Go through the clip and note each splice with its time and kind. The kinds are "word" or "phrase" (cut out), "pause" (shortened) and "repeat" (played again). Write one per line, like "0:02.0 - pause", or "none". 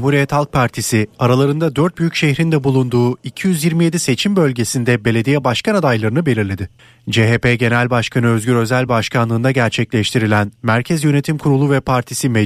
none